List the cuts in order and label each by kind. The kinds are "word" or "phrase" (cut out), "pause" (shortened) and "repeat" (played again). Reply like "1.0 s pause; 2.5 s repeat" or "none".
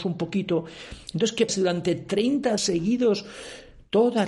1.5 s word; 2.6 s word

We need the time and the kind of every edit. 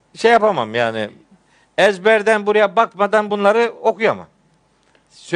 none

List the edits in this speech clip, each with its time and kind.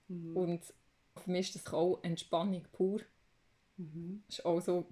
1.2 s word; 1.7 s word

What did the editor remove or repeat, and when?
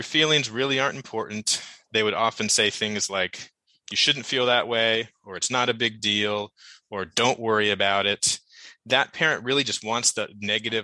none

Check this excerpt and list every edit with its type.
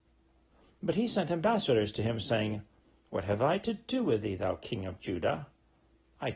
none

